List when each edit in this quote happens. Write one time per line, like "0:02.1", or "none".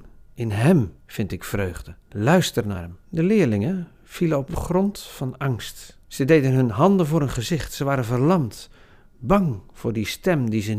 0:01.0
0:02.0
0:03.0
0:06.0

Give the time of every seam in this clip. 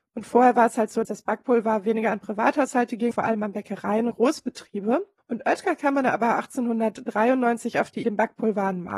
0:01.0
0:03.1
0:04.1
0:05.2
0:08.0

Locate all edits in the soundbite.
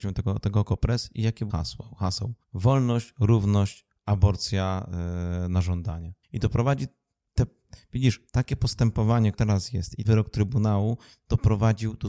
0:01.5
0:02.4
0:06.2
0:08.3
0:09.3
0:10.0

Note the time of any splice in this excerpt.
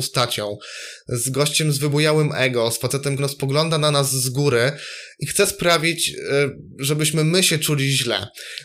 0:03.2

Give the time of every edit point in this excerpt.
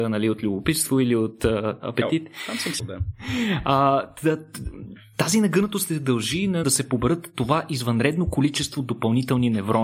0:02.8
0:06.6

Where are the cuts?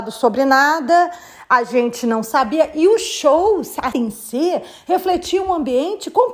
0:03.9

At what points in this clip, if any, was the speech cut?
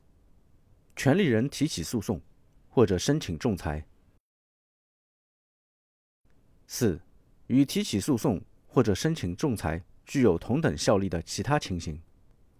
0:07.3

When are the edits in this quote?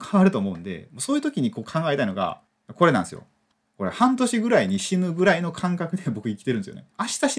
0:03.5

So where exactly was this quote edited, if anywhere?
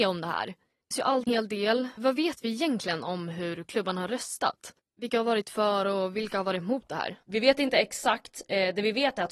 0:00.9
0:01.3
0:02.0
0:07.2

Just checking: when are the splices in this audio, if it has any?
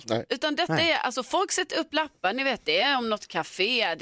none

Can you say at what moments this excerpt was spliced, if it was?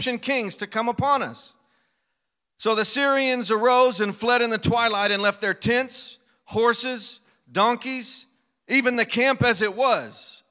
none

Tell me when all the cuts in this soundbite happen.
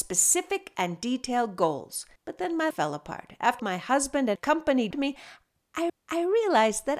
0:02.2
0:02.7
0:03.6
0:04.4
0:04.9
0:05.9

